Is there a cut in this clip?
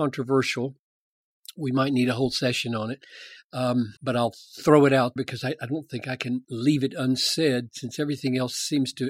yes; 2 cuts; at 4.0 s, 5.2 s

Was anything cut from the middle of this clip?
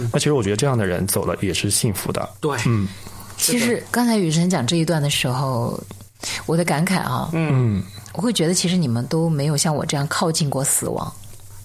no; 0 cuts

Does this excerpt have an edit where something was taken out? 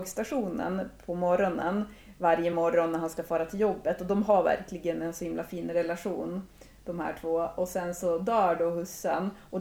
no; 0 cuts

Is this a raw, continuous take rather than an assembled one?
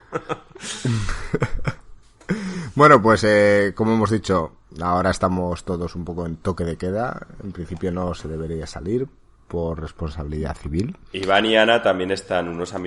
yes; 0 cuts

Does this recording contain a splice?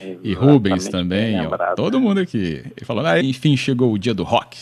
yes; 1 cut; at 3.2 s

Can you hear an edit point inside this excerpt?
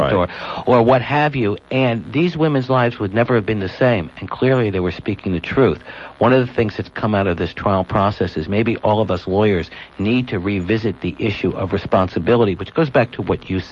no; 0 cuts

